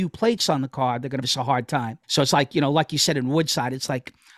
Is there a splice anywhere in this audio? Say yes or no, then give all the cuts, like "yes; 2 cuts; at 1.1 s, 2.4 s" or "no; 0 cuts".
yes; 2 cuts; at 1.2 s, 2.0 s